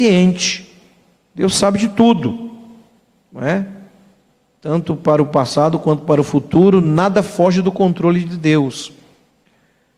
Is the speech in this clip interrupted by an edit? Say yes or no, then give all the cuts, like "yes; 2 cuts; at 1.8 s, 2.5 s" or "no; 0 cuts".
no; 0 cuts